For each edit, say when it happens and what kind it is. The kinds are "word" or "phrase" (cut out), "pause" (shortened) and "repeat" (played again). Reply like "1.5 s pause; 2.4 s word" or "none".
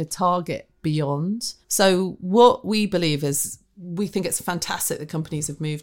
1.6 s pause